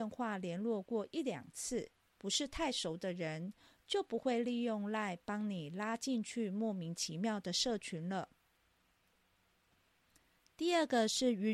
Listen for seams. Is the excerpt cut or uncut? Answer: uncut